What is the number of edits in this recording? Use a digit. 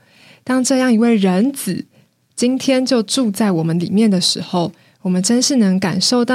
0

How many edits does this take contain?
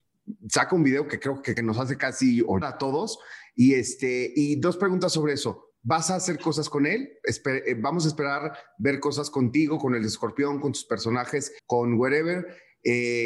4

